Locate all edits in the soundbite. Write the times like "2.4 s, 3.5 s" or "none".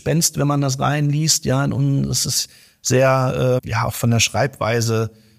3.6 s